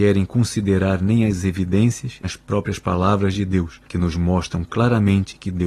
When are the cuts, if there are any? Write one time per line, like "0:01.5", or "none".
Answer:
0:02.2
0:03.9